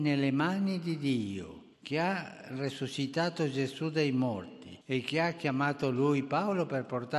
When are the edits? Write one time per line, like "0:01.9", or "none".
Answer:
0:01.7
0:04.8